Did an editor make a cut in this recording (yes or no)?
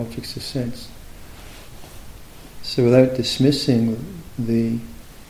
no